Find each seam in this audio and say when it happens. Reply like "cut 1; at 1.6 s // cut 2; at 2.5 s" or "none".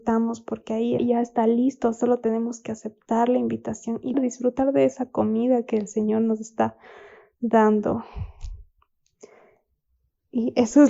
cut 1; at 1.0 s // cut 2; at 4.1 s